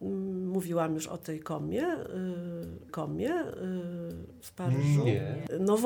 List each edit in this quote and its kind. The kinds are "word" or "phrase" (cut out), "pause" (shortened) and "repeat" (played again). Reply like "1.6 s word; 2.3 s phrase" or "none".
2.9 s repeat